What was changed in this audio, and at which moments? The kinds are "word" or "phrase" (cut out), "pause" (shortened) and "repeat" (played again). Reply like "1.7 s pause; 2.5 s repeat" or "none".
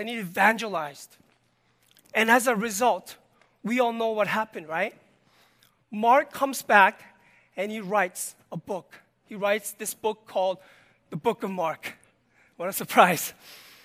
none